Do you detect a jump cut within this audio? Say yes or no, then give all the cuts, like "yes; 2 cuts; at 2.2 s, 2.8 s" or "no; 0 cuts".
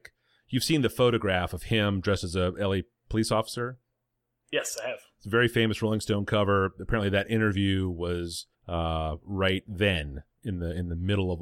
yes; 1 cut; at 8.5 s